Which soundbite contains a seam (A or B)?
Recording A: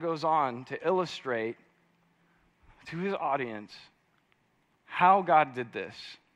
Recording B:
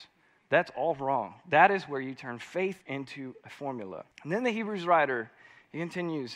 B